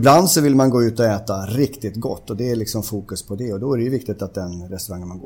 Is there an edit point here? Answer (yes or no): no